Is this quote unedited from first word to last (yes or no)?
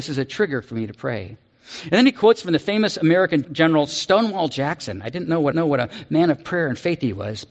no